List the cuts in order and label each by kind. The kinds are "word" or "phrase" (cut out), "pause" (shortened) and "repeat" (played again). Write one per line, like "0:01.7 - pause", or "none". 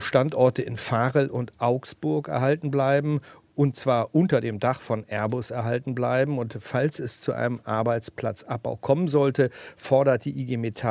none